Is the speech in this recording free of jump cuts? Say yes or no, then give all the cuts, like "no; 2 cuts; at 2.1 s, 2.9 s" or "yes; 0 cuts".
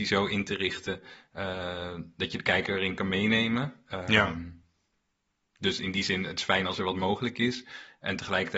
yes; 0 cuts